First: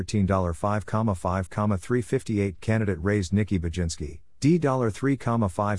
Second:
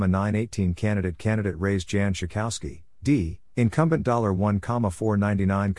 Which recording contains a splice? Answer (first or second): first